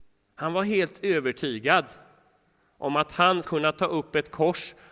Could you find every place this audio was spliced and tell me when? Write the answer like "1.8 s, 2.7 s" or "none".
3.4 s